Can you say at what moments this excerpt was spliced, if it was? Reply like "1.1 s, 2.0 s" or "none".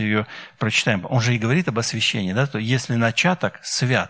none